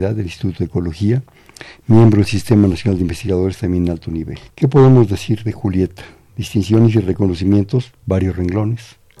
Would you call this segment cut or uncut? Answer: cut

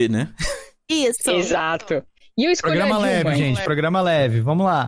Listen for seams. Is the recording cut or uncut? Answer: uncut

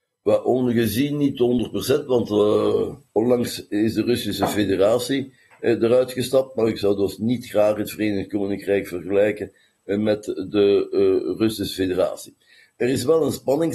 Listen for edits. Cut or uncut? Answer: uncut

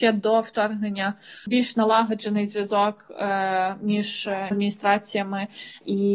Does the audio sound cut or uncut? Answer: cut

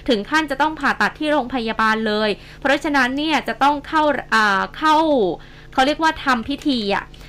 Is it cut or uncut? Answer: uncut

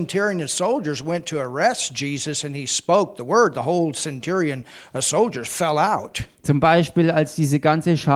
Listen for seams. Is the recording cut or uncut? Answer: uncut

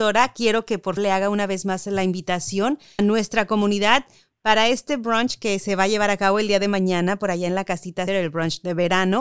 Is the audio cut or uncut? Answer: cut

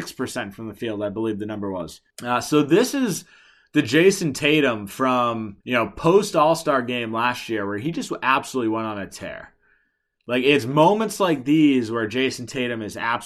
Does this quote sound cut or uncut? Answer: cut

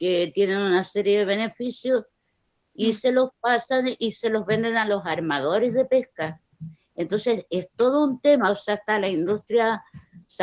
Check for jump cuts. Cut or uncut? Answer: uncut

